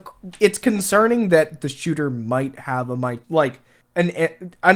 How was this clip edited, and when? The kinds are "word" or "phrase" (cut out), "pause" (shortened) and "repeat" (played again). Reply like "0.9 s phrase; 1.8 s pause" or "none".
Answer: 3.2 s pause